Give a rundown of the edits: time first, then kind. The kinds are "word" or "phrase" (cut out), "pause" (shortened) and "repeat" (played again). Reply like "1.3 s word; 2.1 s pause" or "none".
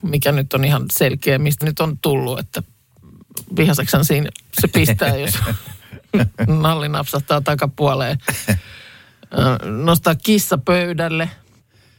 1.6 s word